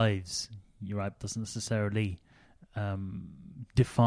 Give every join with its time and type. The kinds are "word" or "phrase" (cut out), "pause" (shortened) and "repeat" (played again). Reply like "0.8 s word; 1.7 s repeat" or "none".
1.1 s phrase